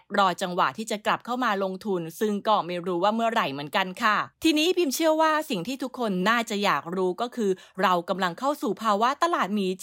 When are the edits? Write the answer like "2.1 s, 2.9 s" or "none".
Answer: 4.3 s